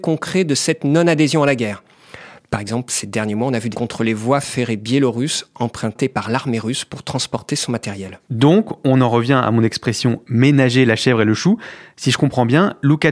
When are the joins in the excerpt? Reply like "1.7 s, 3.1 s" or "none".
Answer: 3.7 s, 8.2 s